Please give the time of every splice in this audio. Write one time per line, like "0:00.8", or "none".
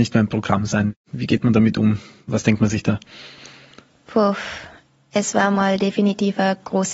none